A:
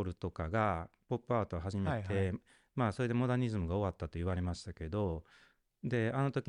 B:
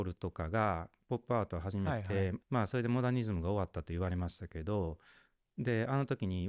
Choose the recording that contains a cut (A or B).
B